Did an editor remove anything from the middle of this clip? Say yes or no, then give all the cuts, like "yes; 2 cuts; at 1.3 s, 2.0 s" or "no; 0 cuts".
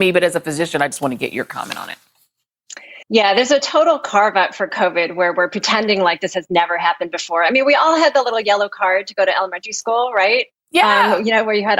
yes; 1 cut; at 3.0 s